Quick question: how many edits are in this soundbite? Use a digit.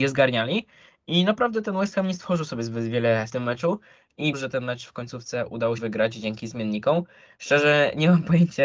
3